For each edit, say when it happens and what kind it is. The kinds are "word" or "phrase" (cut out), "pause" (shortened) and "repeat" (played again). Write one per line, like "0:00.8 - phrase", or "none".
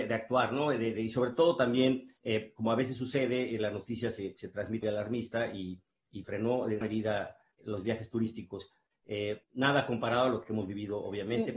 0:02.2 - pause
0:04.8 - word
0:06.2 - word
0:06.8 - word
0:07.6 - word
0:09.4 - pause